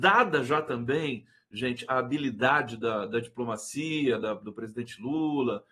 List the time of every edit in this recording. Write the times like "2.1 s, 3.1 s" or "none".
none